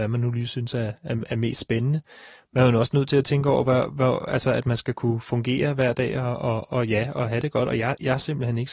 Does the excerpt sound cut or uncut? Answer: uncut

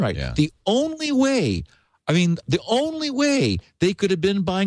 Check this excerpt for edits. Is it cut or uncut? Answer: uncut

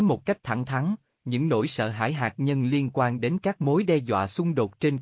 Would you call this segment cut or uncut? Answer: uncut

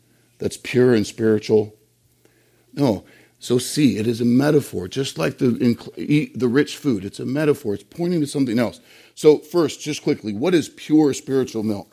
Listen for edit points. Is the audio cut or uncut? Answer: uncut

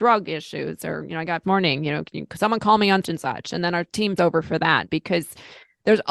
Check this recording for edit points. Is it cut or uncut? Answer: cut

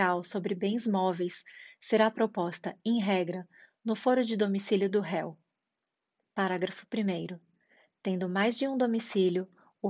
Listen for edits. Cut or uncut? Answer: uncut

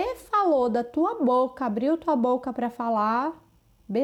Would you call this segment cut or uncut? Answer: uncut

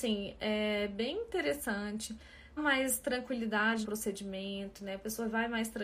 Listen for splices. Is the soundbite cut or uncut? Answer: cut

